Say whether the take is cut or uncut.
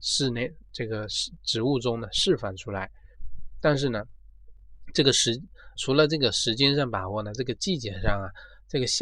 cut